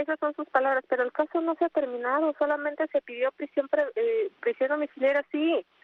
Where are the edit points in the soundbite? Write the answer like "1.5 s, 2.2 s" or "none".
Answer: none